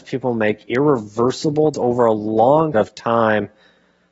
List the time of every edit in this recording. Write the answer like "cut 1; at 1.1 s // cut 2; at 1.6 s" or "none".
cut 1; at 1.7 s // cut 2; at 2.7 s